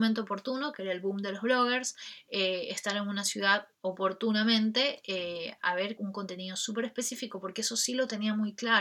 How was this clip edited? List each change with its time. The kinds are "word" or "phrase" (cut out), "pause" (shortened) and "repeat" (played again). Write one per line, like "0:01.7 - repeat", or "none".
0:03.7 - pause
0:06.0 - word